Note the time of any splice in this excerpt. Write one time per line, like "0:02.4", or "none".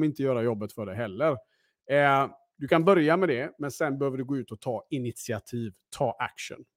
none